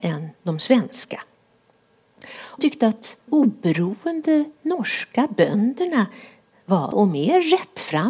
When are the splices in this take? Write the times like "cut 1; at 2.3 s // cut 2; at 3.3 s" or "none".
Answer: cut 1; at 2.6 s // cut 2; at 3.3 s // cut 3; at 6.9 s